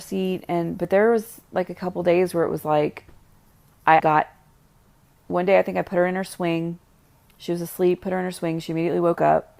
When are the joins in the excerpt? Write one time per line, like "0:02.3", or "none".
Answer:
0:04.0